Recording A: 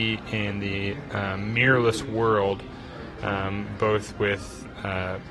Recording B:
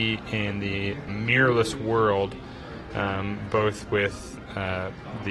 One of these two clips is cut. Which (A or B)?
B